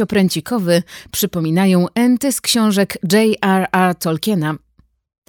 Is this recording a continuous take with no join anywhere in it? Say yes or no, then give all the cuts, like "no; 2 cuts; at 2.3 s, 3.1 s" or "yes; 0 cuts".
yes; 0 cuts